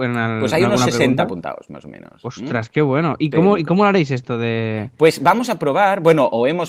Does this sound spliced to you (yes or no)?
no